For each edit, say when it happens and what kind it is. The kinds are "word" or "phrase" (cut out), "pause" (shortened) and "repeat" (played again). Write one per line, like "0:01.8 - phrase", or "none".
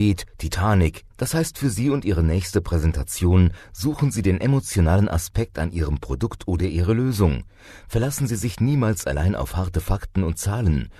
0:01.1 - pause